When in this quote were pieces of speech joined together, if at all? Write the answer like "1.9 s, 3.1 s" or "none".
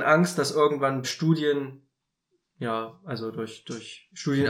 1.0 s